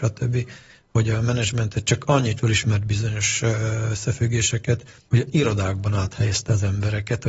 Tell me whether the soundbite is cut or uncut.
cut